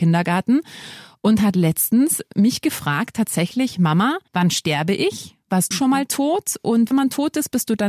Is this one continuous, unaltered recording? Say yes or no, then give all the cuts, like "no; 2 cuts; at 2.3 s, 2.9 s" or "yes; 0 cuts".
no; 3 cuts; at 4.3 s, 5.7 s, 6.9 s